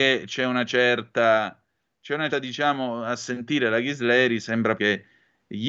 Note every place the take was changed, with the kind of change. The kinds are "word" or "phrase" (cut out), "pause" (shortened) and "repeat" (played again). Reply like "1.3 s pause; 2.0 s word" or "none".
2.3 s word; 4.8 s word